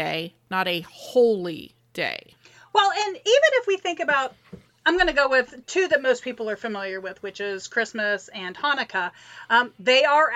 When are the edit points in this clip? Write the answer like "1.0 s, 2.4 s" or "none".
none